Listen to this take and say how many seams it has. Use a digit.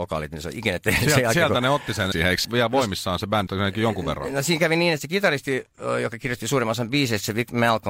3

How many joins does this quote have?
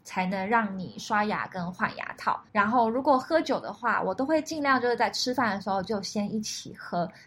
1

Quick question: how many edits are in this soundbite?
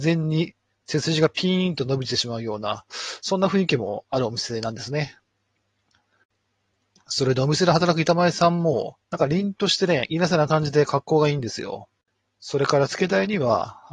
2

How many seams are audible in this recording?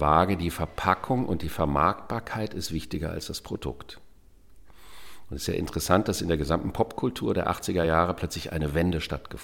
0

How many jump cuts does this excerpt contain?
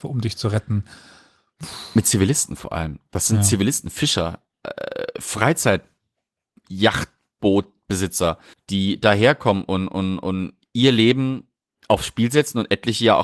2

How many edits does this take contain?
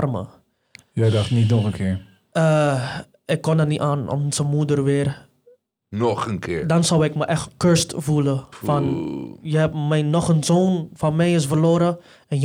0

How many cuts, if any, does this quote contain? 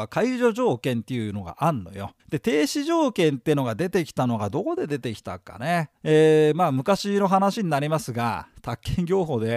2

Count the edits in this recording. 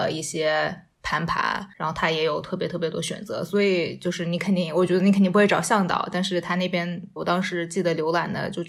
2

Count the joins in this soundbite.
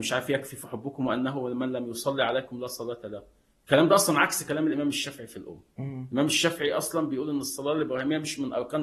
0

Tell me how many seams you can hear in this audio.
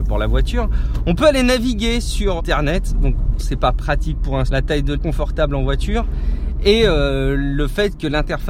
4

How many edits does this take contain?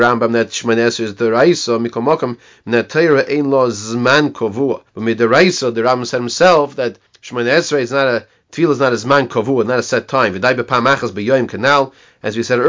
2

